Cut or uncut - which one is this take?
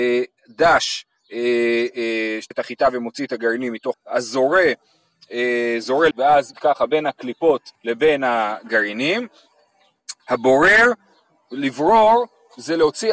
cut